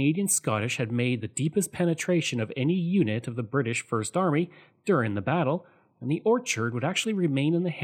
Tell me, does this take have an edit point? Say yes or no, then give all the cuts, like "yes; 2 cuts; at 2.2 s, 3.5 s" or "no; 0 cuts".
no; 0 cuts